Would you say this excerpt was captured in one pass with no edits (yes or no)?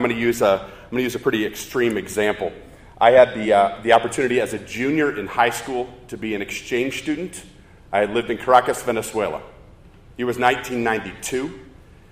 yes